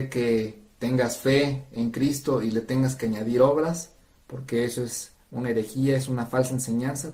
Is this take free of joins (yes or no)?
yes